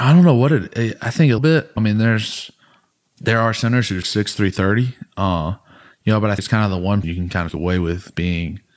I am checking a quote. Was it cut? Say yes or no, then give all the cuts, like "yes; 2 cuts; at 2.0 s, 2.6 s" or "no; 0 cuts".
yes; 6 cuts; at 1.4 s, 1.8 s, 4.0 s, 6.4 s, 7.0 s, 7.5 s